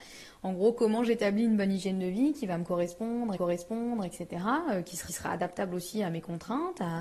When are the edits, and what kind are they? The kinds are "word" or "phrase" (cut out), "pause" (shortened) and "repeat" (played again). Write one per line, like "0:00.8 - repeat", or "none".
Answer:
0:03.4 - repeat
0:05.1 - repeat